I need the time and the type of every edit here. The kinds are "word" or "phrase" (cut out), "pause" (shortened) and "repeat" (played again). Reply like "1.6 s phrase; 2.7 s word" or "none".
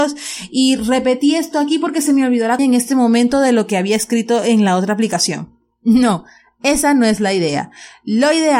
2.6 s word